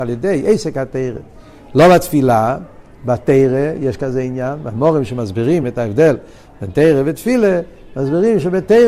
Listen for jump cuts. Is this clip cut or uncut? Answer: uncut